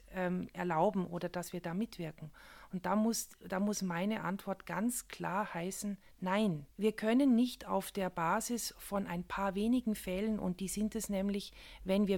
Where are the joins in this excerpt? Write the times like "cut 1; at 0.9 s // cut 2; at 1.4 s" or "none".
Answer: cut 1; at 6.7 s